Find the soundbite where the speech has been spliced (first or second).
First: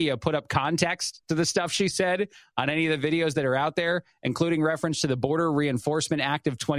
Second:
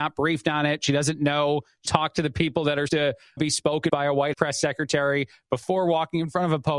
second